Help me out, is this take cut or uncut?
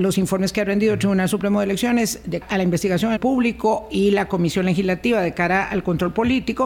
cut